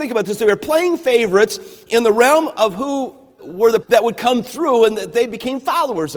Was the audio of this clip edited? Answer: yes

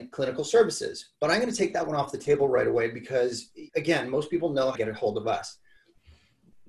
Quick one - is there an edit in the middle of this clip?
yes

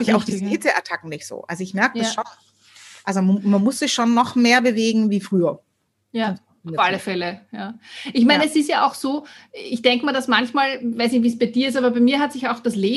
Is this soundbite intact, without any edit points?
yes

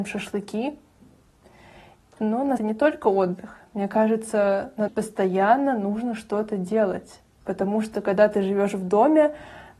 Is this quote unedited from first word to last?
no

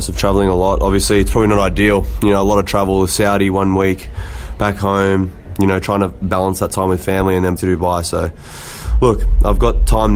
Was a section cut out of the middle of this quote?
yes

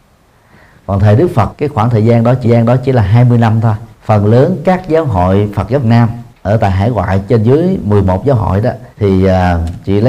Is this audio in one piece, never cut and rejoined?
no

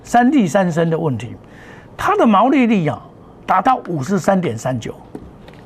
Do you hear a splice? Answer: no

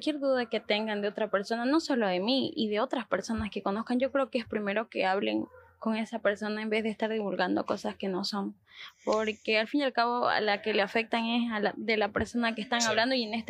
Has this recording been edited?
no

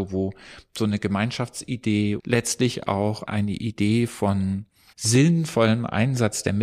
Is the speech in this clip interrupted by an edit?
yes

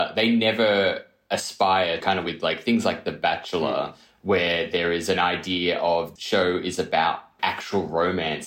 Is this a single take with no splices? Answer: no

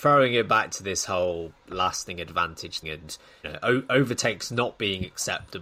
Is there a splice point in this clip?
yes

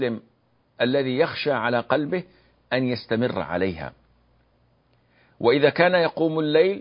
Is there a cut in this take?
no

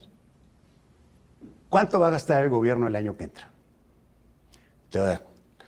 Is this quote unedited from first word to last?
yes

